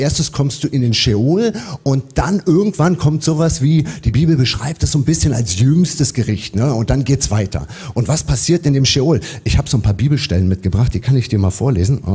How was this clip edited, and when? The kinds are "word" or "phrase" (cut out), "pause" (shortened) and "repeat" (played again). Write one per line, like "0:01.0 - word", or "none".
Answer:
none